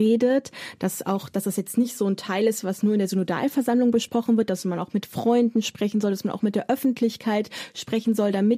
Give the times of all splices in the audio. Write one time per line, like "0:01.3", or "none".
none